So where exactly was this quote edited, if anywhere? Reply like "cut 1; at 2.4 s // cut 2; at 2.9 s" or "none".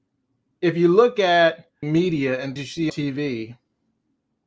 cut 1; at 1.8 s // cut 2; at 2.6 s // cut 3; at 2.9 s